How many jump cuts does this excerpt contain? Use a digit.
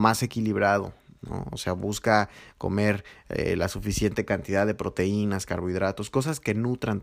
0